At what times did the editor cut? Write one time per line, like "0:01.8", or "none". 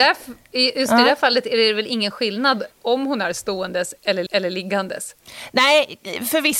0:02.7
0:04.3